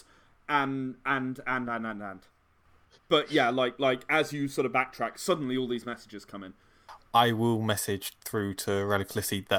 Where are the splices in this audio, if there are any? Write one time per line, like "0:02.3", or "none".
0:01.7